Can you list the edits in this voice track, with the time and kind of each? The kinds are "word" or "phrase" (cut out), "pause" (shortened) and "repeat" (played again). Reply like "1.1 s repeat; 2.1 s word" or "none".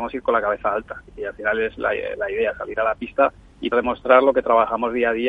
3.7 s word